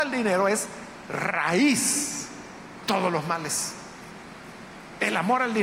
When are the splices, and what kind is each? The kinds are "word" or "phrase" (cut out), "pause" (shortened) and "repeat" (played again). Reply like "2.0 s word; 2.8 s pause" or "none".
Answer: 2.8 s word

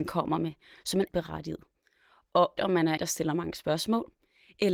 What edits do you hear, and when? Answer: 1.1 s word; 2.6 s word; 3.0 s word

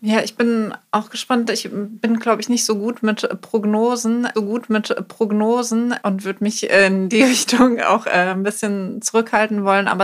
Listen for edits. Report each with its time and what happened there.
4.3 s repeat

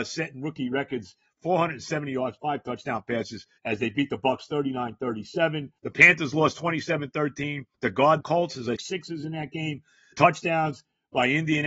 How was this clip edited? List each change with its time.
2.4 s word; 3.6 s pause; 5.8 s pause; 7.7 s pause; 8.2 s phrase; 8.8 s phrase; 10.1 s word

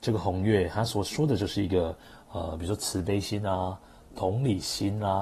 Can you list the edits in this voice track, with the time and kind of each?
none

